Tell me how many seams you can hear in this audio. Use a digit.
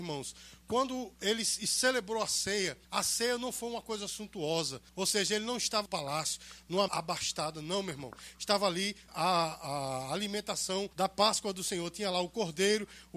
6